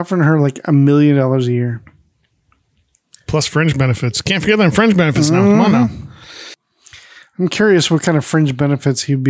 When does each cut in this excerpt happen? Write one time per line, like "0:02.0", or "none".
none